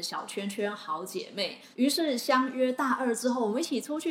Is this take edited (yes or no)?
yes